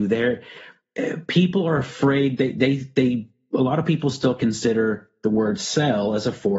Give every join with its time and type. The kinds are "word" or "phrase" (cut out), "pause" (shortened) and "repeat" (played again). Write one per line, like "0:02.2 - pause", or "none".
none